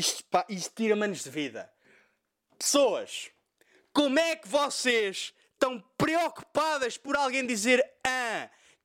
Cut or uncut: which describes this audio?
uncut